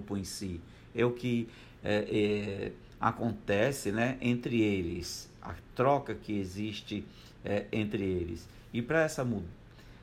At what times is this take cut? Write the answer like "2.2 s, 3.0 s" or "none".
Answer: none